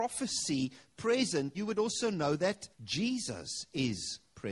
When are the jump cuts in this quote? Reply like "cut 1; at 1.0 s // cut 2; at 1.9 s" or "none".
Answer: cut 1; at 1.5 s // cut 2; at 2.7 s